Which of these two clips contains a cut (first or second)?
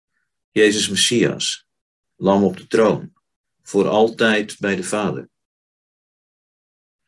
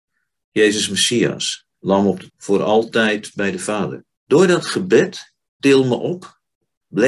second